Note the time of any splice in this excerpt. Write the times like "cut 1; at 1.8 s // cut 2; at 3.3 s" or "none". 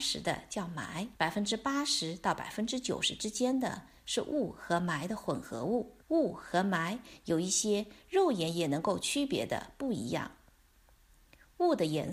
cut 1; at 1.2 s // cut 2; at 6.0 s